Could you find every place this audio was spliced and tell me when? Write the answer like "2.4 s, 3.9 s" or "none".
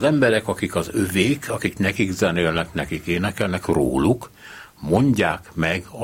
none